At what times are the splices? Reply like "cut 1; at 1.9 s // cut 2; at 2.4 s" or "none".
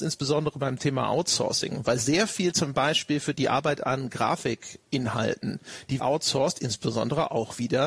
cut 1; at 3.3 s // cut 2; at 6.0 s